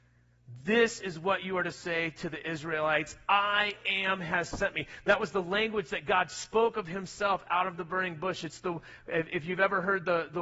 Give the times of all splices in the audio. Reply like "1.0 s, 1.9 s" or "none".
none